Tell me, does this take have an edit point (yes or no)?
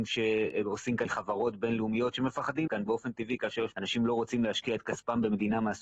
yes